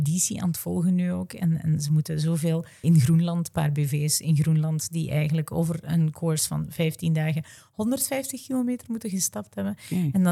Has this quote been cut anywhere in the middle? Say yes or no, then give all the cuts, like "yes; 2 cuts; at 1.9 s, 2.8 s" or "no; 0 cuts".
yes; 1 cut; at 2.8 s